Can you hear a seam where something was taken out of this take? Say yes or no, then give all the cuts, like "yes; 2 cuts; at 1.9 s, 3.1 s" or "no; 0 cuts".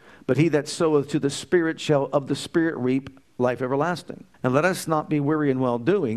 yes; 1 cut; at 4.3 s